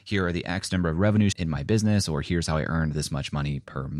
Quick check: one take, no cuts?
no; 1 cut; at 1.3 s

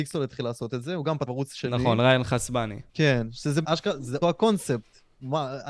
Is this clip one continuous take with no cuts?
no; 4 cuts; at 1.3 s, 2.9 s, 3.6 s, 4.2 s

